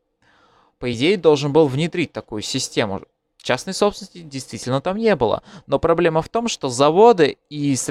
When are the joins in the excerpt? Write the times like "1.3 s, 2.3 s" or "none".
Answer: none